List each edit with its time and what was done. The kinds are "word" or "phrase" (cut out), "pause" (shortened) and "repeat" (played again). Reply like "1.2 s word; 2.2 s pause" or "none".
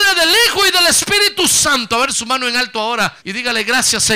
2.1 s word; 3.2 s pause